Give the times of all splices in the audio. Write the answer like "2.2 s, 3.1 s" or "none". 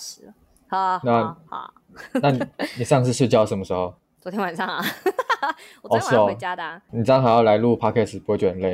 none

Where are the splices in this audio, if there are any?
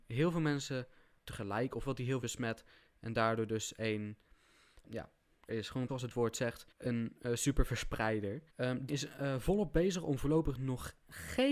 1.2 s, 1.8 s, 2.2 s, 4.9 s, 5.5 s, 5.9 s, 6.7 s, 8.5 s, 8.9 s

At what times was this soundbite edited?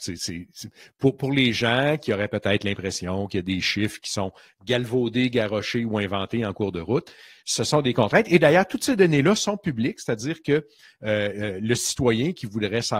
none

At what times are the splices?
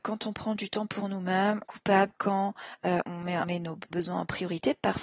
1.6 s, 3.0 s, 3.4 s, 3.9 s

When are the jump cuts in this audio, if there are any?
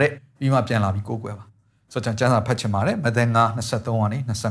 none

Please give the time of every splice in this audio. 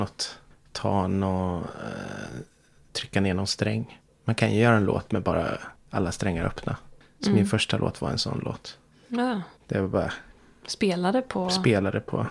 none

